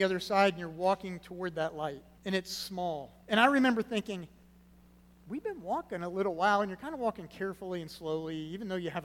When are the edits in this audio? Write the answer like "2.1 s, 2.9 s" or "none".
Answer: 2.2 s, 3.2 s